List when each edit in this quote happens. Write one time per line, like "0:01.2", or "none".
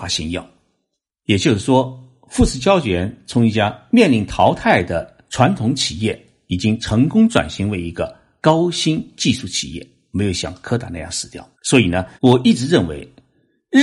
0:11.5
0:12.1